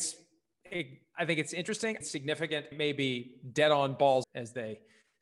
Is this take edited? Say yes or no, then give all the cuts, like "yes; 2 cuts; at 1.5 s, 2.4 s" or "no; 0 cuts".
yes; 3 cuts; at 2.0 s, 2.7 s, 4.2 s